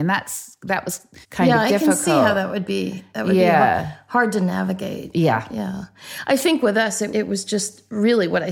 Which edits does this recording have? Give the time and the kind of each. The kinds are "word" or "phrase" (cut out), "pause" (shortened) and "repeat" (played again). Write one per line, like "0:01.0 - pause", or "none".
0:01.2 - pause
0:07.1 - word